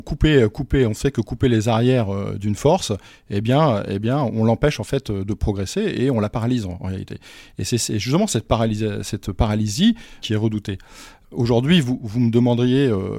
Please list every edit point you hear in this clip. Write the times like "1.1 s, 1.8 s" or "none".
none